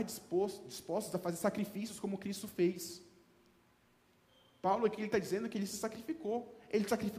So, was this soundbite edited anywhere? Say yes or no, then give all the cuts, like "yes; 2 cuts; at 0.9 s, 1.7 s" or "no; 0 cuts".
no; 0 cuts